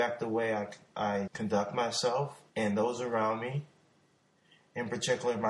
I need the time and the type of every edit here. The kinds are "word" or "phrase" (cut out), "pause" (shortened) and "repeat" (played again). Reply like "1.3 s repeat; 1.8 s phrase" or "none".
1.3 s word; 2.5 s pause